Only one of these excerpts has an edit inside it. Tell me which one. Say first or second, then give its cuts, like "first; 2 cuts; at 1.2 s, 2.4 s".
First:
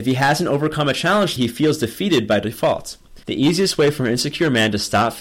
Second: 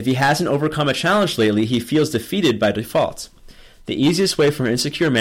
first; 2 cuts; at 1.4 s, 3.2 s